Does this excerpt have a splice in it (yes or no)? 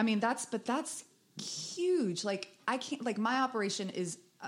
no